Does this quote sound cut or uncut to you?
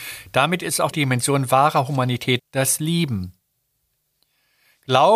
cut